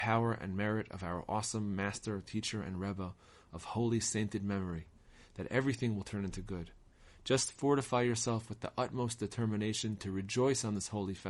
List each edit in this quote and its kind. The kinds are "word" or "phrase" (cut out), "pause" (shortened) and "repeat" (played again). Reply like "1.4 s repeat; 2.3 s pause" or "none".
none